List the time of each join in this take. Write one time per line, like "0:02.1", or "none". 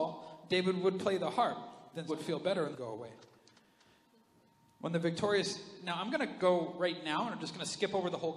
0:02.1
0:02.7